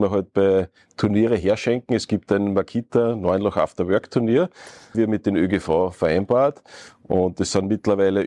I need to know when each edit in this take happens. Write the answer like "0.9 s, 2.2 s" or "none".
4.9 s